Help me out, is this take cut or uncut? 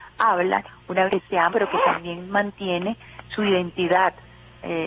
cut